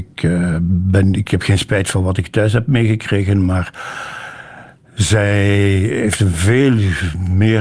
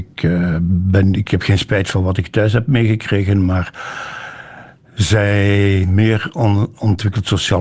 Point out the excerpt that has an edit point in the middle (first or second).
second